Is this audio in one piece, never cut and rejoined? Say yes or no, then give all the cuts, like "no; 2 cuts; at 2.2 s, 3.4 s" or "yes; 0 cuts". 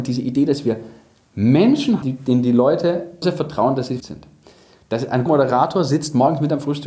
no; 4 cuts; at 2.0 s, 3.2 s, 4.0 s, 5.3 s